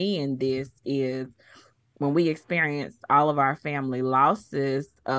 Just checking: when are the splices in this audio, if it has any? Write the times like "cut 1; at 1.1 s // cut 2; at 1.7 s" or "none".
none